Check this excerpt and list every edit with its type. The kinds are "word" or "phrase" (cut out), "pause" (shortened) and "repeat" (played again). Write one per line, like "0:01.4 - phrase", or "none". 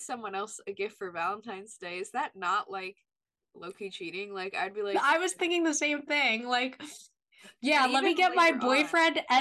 0:03.2 - pause